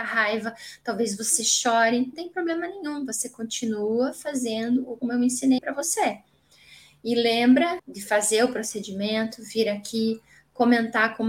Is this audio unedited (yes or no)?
no